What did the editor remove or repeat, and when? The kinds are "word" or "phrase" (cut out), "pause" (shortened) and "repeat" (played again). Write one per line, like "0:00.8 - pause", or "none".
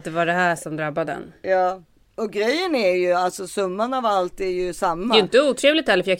none